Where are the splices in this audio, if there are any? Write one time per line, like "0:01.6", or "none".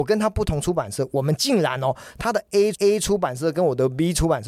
0:02.7